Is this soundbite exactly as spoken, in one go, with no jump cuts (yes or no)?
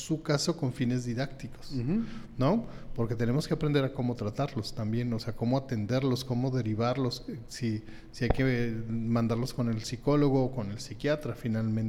yes